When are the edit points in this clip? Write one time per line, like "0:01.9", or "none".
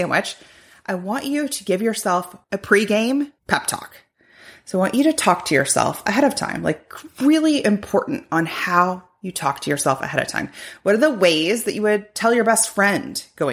0:02.4
0:03.4